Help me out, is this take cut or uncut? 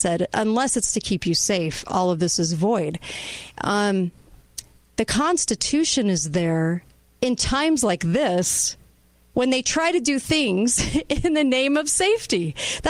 uncut